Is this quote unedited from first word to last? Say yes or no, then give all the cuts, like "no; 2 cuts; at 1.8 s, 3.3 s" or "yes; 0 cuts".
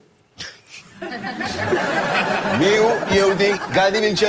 yes; 0 cuts